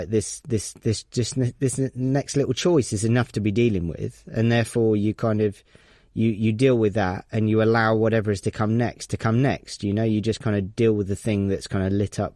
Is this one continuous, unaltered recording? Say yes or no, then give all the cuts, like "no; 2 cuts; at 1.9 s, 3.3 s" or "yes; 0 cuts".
yes; 0 cuts